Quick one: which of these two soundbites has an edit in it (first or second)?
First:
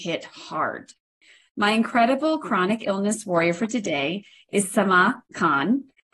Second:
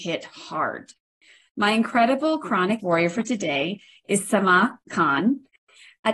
second